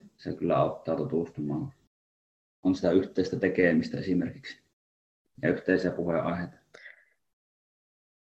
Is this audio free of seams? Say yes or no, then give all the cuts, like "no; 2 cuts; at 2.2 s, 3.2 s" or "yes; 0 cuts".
no; 1 cut; at 2.3 s